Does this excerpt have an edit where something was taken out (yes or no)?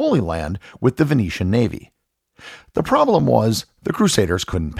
no